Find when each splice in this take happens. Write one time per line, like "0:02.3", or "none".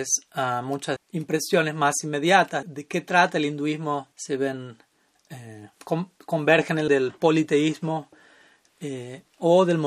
0:01.0
0:02.6
0:04.1
0:05.7
0:06.9

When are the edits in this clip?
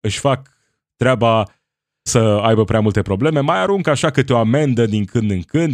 0:02.1

